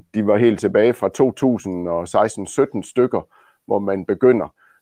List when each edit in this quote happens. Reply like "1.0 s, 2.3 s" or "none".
none